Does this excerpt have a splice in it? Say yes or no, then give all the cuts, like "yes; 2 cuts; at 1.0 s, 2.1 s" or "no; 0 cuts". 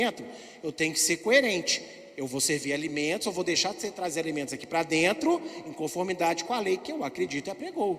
no; 0 cuts